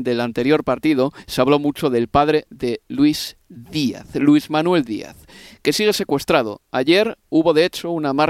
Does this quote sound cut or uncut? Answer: uncut